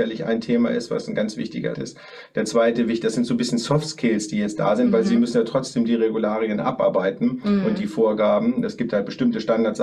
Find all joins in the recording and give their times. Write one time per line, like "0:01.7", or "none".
0:01.7